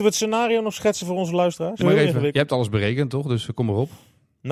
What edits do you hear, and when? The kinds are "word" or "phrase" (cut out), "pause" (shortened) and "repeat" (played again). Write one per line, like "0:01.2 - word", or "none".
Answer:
0:01.8 - word